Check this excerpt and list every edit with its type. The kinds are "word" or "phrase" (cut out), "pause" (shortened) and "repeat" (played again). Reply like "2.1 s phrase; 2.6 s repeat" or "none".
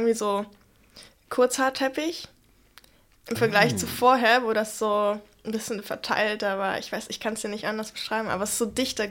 none